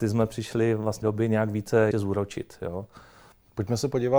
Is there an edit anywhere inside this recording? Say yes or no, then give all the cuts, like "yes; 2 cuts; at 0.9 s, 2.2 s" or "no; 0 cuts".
yes; 2 cuts; at 1.0 s, 1.9 s